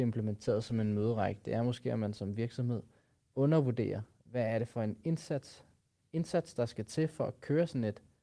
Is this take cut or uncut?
uncut